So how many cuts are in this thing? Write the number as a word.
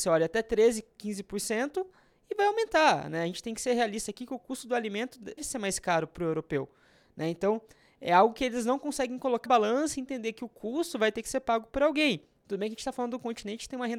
two